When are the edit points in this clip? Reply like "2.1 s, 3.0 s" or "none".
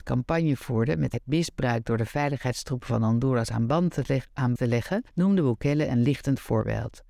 1.1 s, 4.6 s, 5.1 s